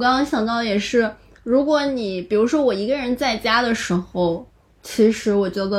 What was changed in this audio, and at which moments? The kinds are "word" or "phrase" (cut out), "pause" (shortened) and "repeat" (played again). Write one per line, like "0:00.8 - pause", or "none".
none